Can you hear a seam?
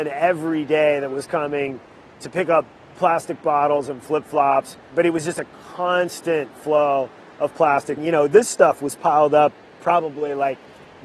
no; 0 cuts

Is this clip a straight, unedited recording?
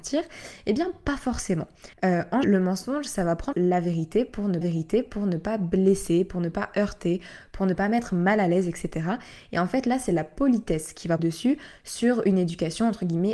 no; 5 cuts; at 1.9 s, 2.4 s, 3.5 s, 4.6 s, 11.2 s

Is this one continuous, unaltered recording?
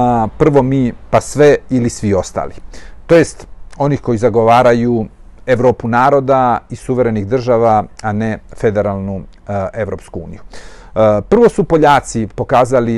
yes; 0 cuts

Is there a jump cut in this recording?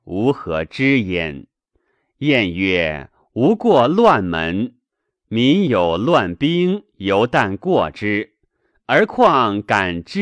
no; 0 cuts

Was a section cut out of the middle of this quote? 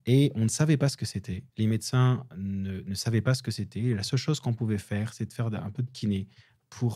yes; 1 cut; at 1.5 s

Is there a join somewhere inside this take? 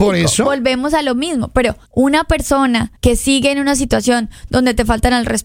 yes; 2 cuts; at 1.9 s, 3.0 s

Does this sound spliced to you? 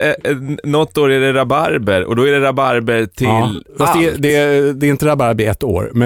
no; 0 cuts

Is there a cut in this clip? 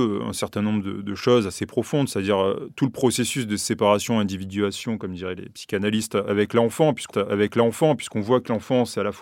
yes; 1 cut; at 7.1 s

